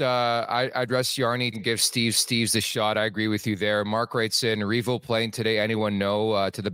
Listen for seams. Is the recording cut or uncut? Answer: cut